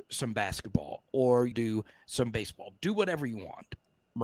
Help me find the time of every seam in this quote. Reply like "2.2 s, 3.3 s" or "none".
1.5 s